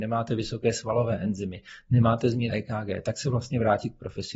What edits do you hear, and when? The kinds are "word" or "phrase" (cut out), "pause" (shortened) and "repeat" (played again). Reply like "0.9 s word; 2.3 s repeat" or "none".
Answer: 2.5 s word